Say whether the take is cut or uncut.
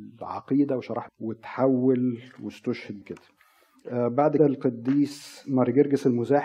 cut